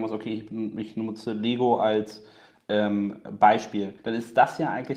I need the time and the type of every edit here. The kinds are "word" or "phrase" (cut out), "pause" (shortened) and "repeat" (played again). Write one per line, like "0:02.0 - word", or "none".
0:04.0 - pause

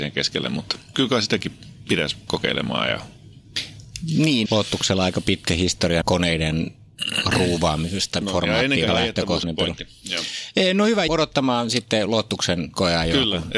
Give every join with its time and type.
0:00.9 - word
0:02.3 - word
0:04.5 - word
0:06.0 - word
0:08.2 - word
0:08.9 - word
0:09.4 - word
0:11.1 - word

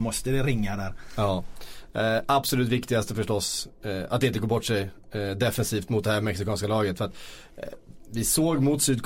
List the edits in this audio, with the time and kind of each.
none

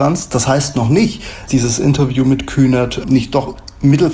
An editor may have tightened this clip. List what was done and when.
0:01.5 - word
0:03.0 - word

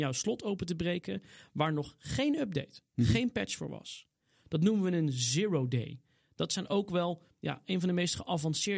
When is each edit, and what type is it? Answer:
none

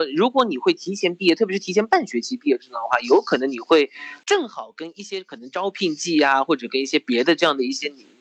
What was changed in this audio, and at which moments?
0:04.2 - word

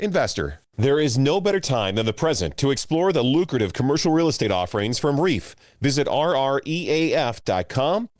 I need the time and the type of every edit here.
none

